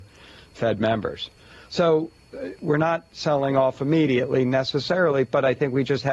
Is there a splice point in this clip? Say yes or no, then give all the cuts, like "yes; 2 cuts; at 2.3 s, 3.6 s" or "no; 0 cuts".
no; 0 cuts